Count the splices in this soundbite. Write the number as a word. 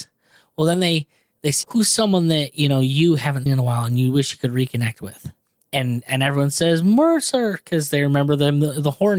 two